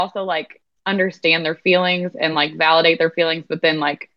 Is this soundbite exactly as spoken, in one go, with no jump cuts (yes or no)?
yes